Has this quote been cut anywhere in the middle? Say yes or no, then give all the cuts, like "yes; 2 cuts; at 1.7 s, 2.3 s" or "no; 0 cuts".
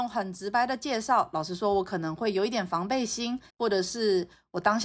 yes; 1 cut; at 3.5 s